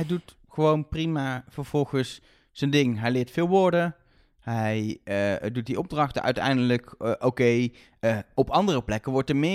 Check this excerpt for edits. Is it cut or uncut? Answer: uncut